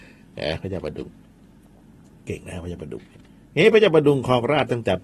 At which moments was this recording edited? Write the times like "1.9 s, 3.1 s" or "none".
3.3 s